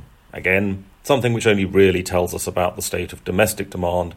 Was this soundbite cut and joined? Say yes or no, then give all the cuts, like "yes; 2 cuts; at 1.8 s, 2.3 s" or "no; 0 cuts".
no; 0 cuts